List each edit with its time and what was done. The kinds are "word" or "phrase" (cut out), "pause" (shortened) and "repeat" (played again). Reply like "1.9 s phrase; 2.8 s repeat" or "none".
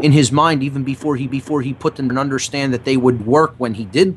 1.3 s repeat; 2.1 s word; 3.2 s word

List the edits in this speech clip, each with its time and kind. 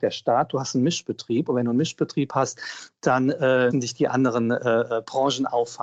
3.7 s word

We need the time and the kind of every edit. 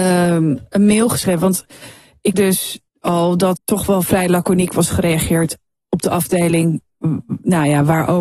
2.3 s word; 2.9 s pause; 3.6 s word

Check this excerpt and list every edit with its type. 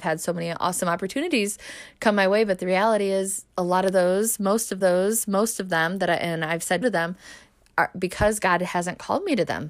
3.5 s pause; 4.8 s repeat; 6.8 s word

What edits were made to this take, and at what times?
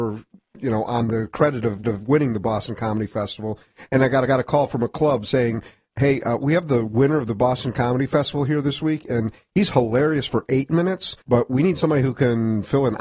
1.8 s repeat; 4.3 s repeat; 11.2 s pause

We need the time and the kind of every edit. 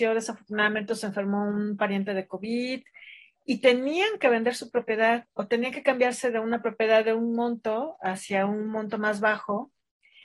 none

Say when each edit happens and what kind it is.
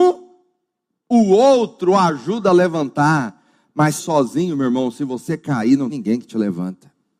4.0 s word; 5.9 s word

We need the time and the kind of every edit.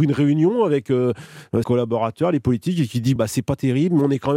1.6 s word; 3.2 s word

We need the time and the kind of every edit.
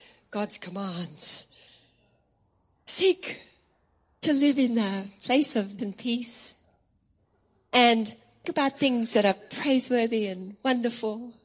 5.8 s word; 8.4 s word

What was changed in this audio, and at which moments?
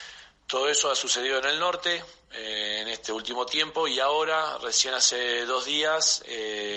none

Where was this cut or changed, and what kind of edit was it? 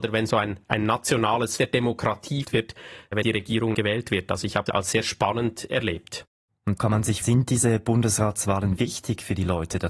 1.6 s word; 2.4 s word; 3.2 s word; 3.7 s word; 4.7 s word; 6.8 s word; 7.2 s word; 8.8 s word

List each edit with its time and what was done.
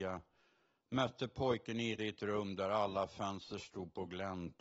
2.0 s word

